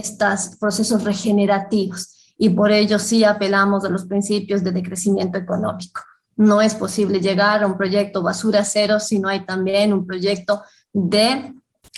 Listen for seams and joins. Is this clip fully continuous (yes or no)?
yes